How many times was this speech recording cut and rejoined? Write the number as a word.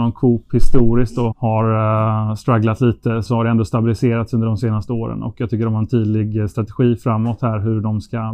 two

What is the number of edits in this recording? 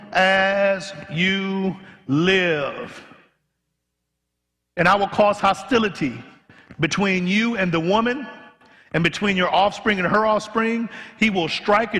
zero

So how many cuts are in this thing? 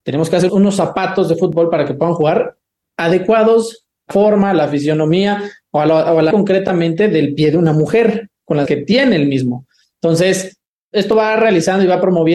three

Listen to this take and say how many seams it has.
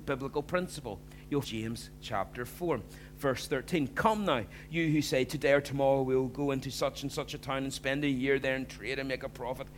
one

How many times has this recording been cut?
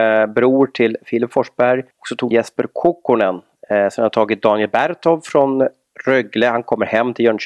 two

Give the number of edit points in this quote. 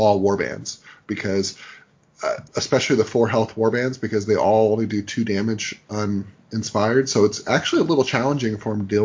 one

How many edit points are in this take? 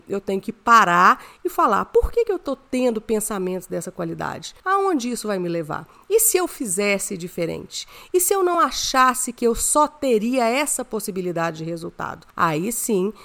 zero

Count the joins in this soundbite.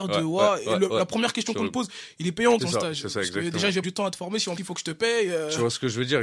three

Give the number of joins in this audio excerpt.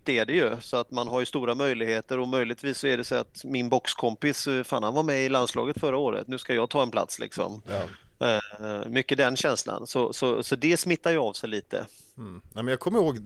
zero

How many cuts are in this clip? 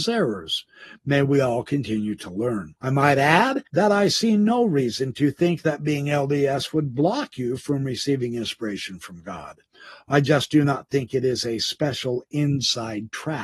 two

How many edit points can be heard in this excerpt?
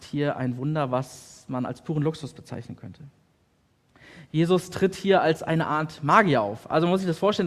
zero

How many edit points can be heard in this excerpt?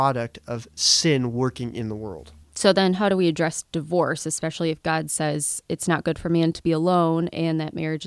one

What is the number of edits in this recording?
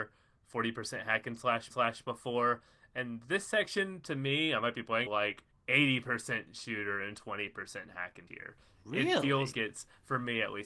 five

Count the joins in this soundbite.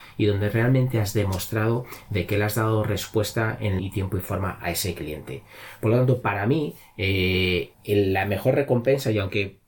two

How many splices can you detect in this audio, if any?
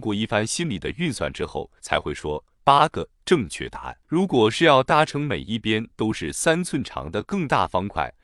two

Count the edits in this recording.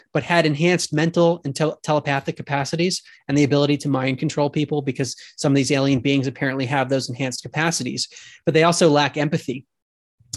zero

